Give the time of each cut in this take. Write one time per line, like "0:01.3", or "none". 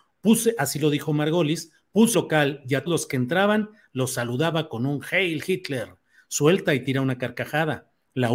0:02.1
0:02.9